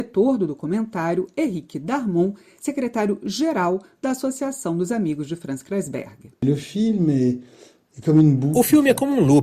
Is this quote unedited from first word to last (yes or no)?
yes